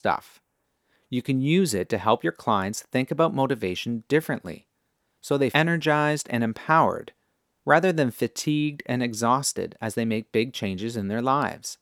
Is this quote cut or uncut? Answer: cut